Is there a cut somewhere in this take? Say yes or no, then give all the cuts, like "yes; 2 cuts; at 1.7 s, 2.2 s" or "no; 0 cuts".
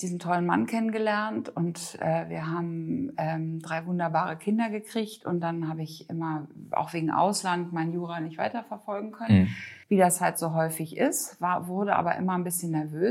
yes; 1 cut; at 9.8 s